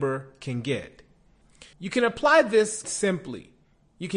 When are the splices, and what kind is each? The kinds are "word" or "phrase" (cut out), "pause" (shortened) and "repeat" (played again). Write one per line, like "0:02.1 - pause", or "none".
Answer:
0:01.7 - pause
0:02.8 - word